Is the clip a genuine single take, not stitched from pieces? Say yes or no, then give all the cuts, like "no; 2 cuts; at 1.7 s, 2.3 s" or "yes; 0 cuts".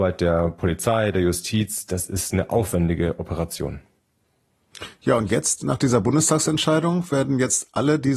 yes; 0 cuts